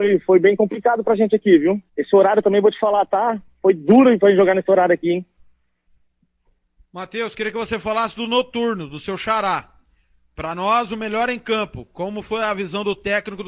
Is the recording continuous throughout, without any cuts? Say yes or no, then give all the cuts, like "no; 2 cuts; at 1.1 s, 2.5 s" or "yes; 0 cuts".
no; 1 cut; at 1.9 s